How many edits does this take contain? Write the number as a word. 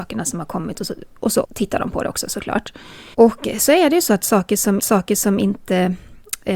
three